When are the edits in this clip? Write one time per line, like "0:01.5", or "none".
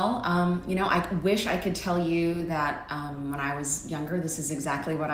none

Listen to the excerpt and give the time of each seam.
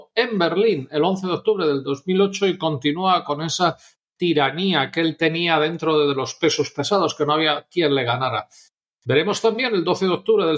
none

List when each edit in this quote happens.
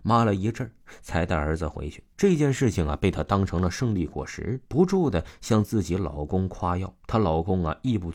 0:02.1
0:04.6
0:07.0

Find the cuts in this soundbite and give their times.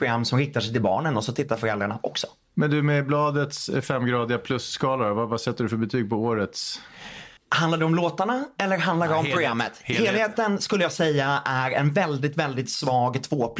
0:07.4

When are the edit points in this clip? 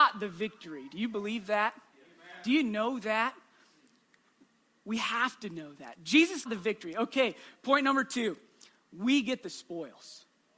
0:06.4

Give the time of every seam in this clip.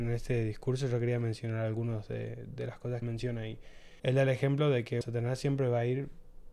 0:03.0
0:04.0
0:05.0

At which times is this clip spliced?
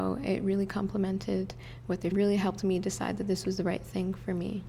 0:02.1

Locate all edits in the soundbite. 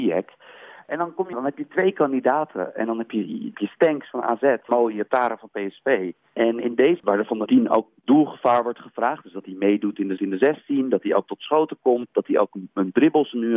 0:01.3
0:03.5
0:04.7
0:07.0
0:07.5
0:10.2

